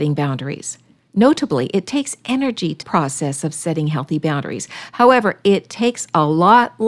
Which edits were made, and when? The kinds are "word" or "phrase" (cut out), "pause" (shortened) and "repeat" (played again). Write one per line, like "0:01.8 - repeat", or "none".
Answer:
0:02.8 - phrase